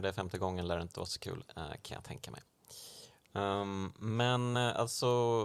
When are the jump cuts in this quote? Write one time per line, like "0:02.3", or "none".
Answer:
none